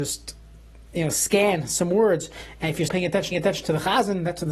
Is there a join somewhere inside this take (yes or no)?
yes